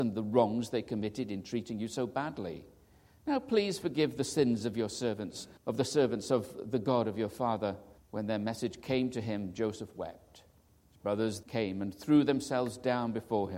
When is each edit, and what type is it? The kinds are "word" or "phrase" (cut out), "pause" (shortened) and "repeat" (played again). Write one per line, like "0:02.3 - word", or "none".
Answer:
0:05.6 - pause
0:08.0 - pause
0:10.7 - pause
0:11.4 - word